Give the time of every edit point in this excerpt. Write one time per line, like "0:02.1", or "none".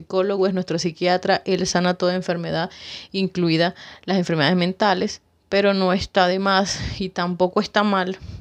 none